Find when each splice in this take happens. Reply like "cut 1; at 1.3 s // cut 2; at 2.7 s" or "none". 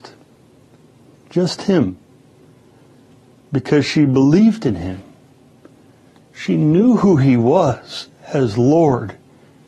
none